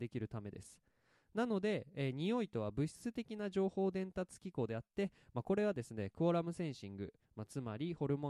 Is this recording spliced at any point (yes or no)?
no